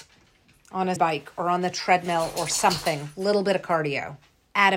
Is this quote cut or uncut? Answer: cut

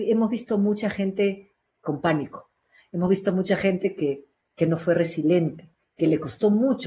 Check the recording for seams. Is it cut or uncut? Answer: uncut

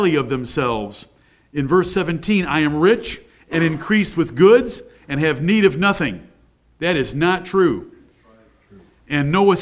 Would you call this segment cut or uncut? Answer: uncut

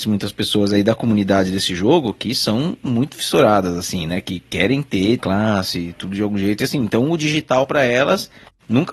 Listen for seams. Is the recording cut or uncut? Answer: cut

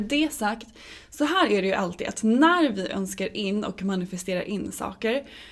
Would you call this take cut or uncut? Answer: uncut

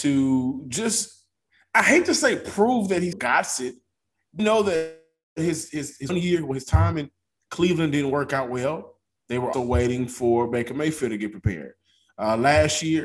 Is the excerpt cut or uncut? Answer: cut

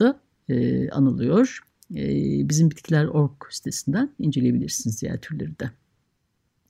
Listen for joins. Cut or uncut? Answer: uncut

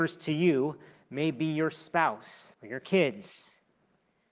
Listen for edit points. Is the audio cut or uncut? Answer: cut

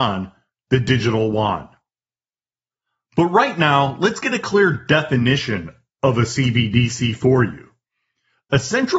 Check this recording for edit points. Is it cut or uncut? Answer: uncut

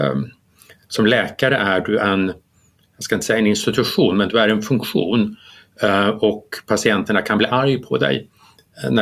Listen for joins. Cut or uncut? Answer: uncut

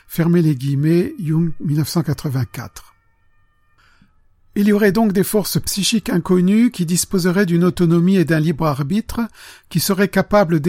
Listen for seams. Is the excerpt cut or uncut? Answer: uncut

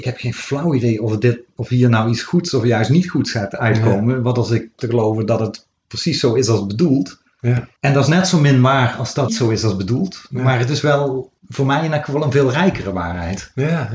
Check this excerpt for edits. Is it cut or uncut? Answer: cut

